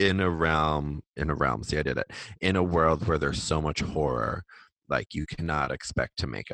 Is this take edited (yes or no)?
no